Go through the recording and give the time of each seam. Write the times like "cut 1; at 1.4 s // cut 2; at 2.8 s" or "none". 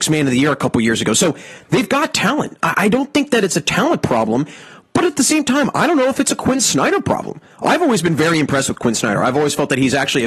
none